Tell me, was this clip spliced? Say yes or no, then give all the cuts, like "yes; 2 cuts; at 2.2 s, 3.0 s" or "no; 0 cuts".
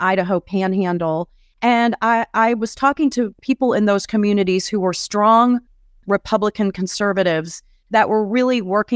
no; 0 cuts